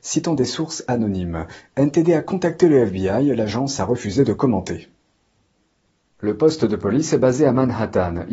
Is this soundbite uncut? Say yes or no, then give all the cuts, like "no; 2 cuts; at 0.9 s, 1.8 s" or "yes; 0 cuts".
yes; 0 cuts